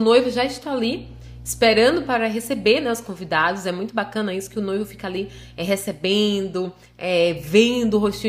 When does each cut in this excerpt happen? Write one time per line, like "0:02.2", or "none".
none